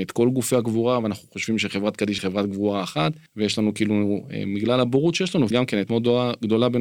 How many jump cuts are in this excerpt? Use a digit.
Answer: 4